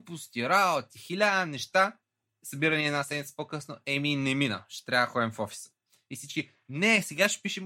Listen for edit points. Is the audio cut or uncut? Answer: cut